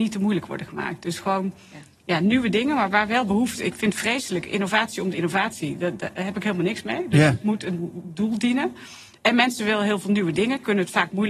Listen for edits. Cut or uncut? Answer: uncut